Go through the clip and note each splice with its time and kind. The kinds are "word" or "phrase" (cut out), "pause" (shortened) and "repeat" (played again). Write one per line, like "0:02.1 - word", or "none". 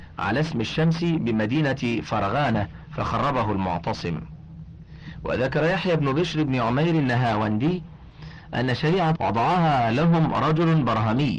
0:09.2 - word